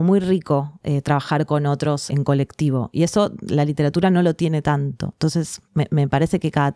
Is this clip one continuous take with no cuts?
no; 2 cuts; at 2.1 s, 5.7 s

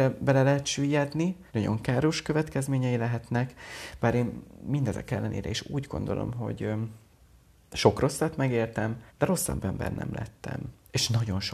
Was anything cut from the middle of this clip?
yes; 3 cuts; at 1.5 s, 7.2 s, 9.1 s

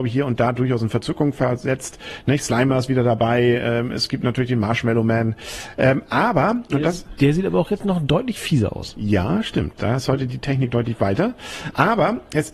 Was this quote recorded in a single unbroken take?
yes; 0 cuts

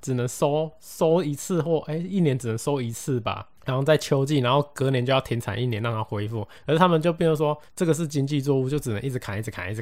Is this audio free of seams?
no; 2 cuts; at 6.6 s, 7.7 s

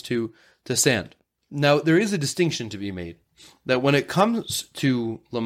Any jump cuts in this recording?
no; 0 cuts

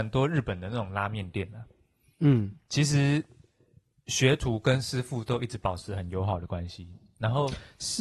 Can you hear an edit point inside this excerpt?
no; 0 cuts

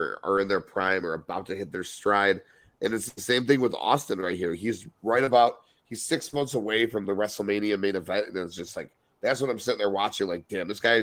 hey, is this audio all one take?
yes; 0 cuts

